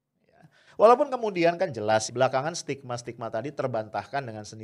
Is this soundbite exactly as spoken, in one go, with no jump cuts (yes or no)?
no